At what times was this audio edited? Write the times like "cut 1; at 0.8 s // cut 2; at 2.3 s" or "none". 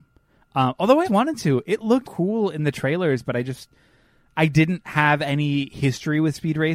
cut 1; at 1.0 s // cut 2; at 2.0 s